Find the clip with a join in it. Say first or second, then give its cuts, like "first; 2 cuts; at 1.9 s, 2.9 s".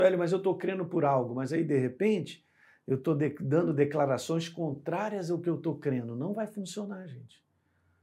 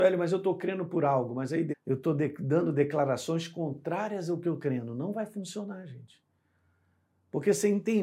second; 2 cuts; at 1.7 s, 4.6 s